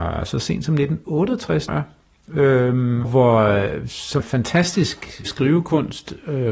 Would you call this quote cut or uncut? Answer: cut